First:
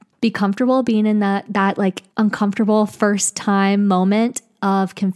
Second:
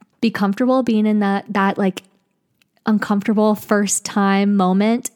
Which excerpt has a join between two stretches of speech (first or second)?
first